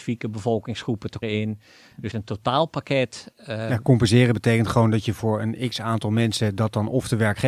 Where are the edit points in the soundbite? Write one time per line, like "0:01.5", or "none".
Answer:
0:01.2
0:02.1